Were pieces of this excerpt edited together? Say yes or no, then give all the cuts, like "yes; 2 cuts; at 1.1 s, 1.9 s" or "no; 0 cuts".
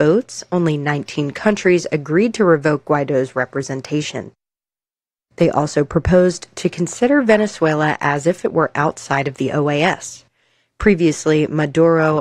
no; 0 cuts